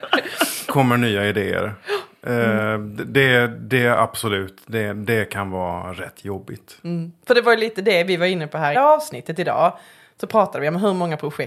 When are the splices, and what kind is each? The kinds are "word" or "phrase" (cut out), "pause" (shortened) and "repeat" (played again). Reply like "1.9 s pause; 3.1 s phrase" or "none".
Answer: 8.7 s phrase